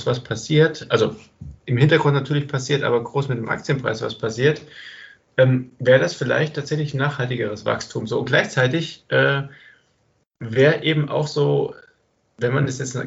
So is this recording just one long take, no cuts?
yes; 0 cuts

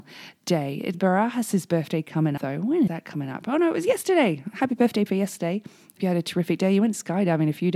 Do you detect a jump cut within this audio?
yes; 5 cuts; at 0.9 s, 2.4 s, 2.9 s, 5.1 s, 6.0 s

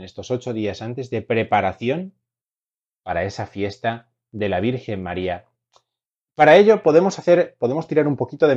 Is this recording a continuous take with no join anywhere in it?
yes; 0 cuts

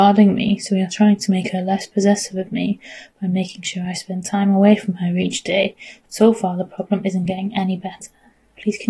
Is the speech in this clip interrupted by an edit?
no; 0 cuts

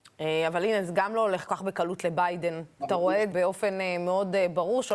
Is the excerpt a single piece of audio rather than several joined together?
no; 2 cuts; at 1.5 s, 3.3 s

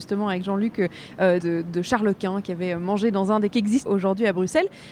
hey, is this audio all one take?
no; 3 cuts; at 1.4 s, 3.5 s, 3.9 s

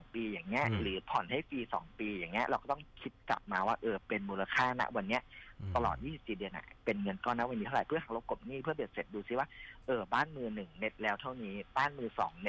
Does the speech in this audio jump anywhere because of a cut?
no; 0 cuts

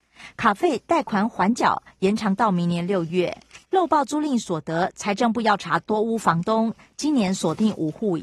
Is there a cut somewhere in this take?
yes; 1 cut; at 3.6 s

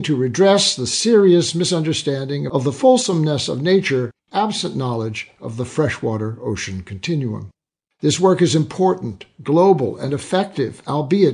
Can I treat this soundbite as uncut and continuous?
yes; 0 cuts

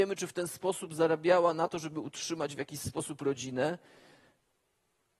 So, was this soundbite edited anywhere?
no; 0 cuts

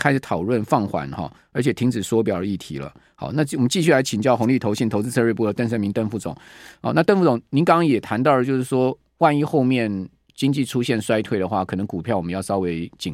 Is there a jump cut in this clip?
no; 0 cuts

